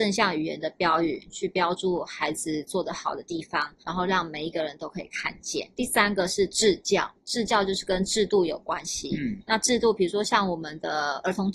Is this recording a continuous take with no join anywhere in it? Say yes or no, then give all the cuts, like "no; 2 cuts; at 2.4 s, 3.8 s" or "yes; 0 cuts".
no; 3 cuts; at 3.8 s, 5.7 s, 7.2 s